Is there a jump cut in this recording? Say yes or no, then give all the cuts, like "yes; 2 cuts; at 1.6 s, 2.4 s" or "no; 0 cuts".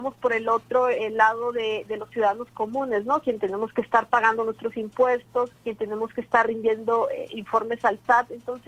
yes; 1 cut; at 5.6 s